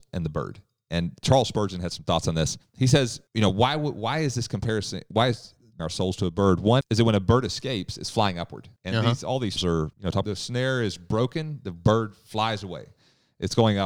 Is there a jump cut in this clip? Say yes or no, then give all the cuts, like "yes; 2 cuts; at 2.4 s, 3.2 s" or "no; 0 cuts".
yes; 8 cuts; at 2.6 s, 3.3 s, 5.8 s, 6.8 s, 8.8 s, 9.6 s, 9.9 s, 10.2 s